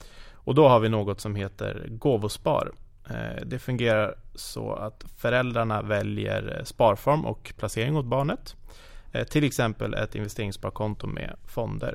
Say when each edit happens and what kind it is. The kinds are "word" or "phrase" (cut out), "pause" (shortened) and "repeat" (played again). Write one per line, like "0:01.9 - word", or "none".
none